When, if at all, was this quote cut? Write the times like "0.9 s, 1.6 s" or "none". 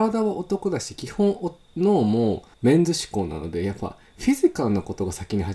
2.5 s